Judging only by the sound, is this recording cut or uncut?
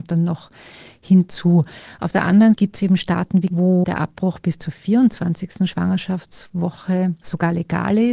cut